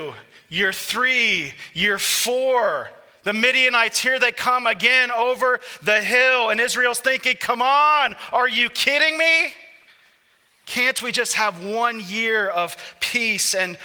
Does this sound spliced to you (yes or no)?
no